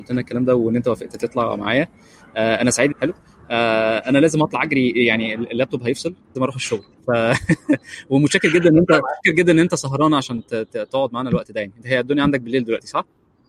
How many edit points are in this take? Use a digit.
3